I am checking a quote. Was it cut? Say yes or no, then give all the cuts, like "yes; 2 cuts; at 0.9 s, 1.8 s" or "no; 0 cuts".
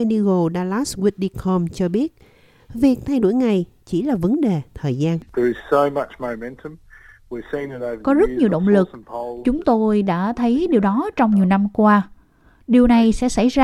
no; 0 cuts